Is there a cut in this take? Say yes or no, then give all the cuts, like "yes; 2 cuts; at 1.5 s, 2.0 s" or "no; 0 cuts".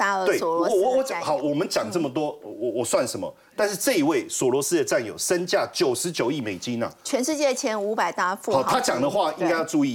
no; 0 cuts